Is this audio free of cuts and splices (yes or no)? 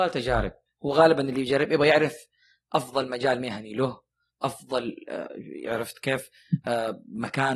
yes